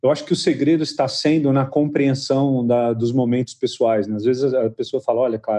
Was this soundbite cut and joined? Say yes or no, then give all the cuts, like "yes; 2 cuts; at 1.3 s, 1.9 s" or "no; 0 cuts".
no; 0 cuts